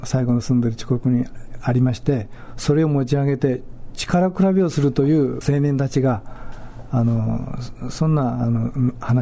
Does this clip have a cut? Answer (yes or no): yes